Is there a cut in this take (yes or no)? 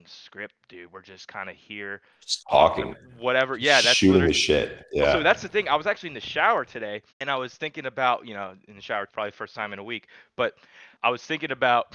yes